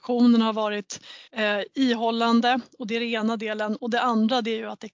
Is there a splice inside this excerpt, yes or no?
yes